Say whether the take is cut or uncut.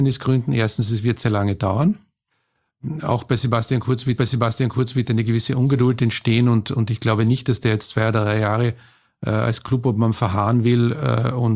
cut